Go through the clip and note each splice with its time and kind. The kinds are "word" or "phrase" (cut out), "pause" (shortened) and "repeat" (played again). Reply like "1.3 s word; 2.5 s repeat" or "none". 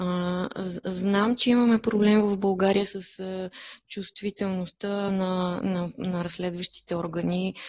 none